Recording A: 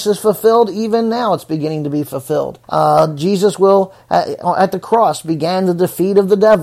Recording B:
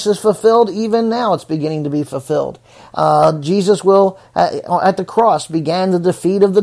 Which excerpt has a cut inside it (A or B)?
A